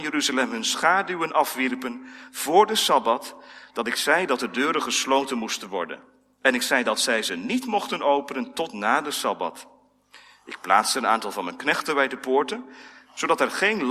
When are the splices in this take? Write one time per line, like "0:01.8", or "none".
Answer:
none